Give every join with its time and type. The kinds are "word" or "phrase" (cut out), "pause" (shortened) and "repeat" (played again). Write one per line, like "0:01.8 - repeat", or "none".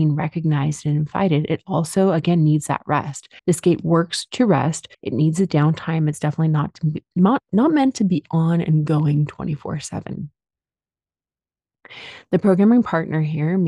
0:03.4 - pause
0:04.9 - pause